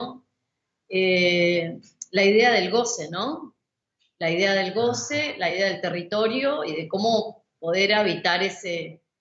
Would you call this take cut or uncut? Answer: uncut